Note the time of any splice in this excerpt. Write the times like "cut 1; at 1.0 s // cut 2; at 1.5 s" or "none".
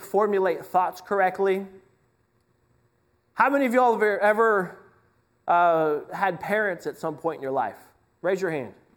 none